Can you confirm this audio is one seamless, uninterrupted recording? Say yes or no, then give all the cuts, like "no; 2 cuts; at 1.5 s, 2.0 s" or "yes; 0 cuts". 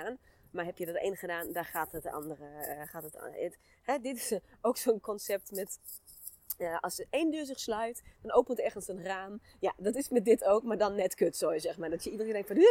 yes; 0 cuts